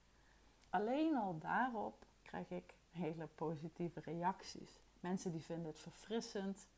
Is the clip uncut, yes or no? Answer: no